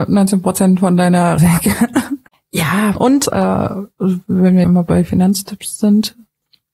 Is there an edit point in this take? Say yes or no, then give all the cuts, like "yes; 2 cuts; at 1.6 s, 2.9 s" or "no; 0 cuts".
yes; 4 cuts; at 1.4 s, 2.9 s, 3.2 s, 4.6 s